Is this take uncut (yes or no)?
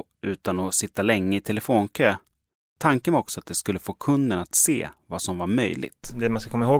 yes